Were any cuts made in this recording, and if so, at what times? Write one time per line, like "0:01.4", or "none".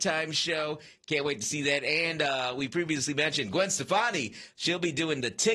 none